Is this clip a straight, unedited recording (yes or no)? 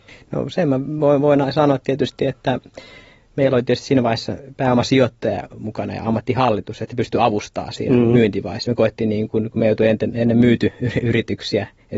yes